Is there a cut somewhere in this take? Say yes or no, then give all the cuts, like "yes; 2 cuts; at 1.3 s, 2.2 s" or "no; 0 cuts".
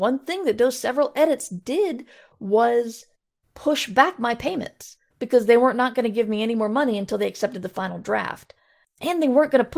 no; 0 cuts